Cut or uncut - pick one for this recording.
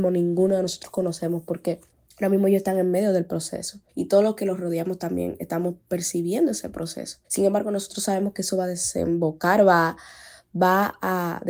cut